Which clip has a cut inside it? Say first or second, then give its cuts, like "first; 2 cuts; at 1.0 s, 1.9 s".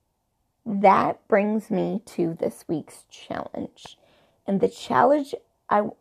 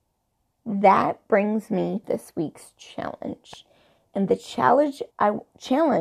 second; 2 cuts; at 2.0 s, 5.1 s